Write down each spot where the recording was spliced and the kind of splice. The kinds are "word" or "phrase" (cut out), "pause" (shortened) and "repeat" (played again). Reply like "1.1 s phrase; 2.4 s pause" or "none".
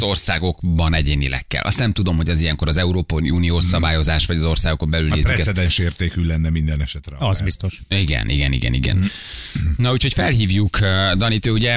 none